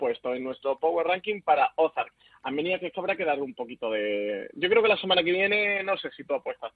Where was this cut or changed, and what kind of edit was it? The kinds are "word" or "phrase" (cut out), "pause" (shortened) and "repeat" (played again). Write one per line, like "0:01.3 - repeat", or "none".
none